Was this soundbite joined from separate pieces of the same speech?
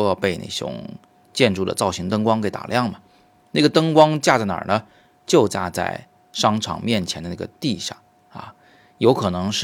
no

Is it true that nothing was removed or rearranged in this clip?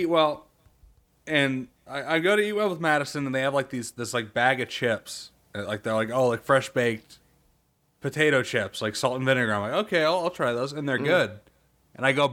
yes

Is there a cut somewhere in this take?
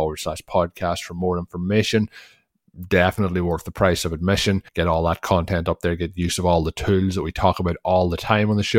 yes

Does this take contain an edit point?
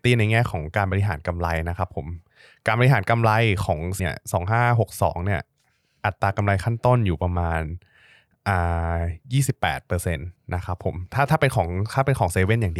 yes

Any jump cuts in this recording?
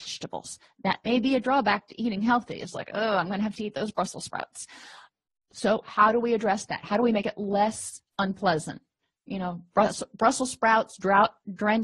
no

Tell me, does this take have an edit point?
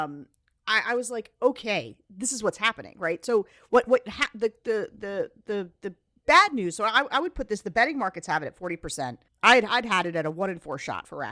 yes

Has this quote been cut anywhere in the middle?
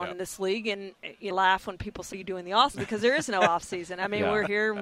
yes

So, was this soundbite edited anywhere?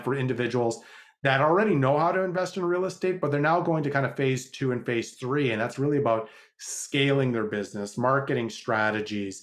no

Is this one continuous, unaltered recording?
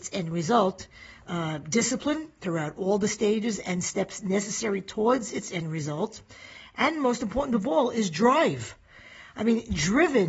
yes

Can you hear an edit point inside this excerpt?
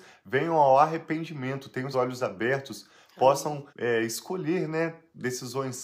yes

